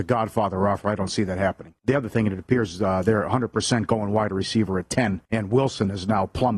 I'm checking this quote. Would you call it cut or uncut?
cut